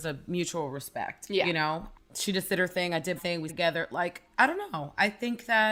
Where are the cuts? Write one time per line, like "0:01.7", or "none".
0:01.9
0:03.2
0:03.5
0:04.3